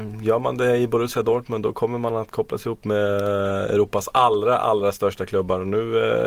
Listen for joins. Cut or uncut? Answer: uncut